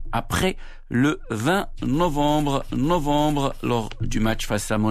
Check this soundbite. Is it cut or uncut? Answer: cut